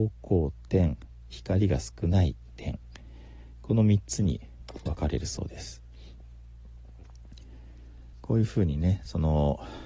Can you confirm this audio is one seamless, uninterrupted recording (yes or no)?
no